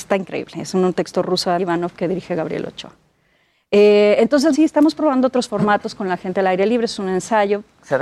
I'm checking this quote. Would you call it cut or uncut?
cut